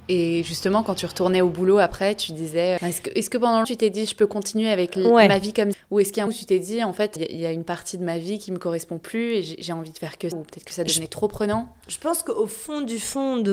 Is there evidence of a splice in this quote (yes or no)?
yes